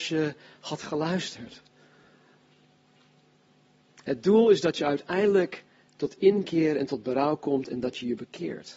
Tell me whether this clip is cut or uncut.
uncut